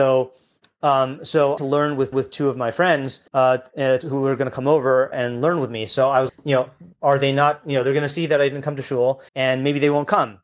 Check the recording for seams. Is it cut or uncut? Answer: cut